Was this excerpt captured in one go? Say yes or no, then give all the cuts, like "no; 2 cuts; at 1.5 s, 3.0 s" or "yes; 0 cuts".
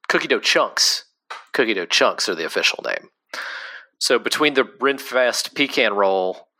yes; 0 cuts